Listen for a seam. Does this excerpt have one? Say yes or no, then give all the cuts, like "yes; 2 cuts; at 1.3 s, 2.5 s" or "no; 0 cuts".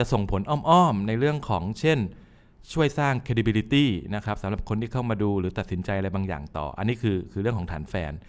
no; 0 cuts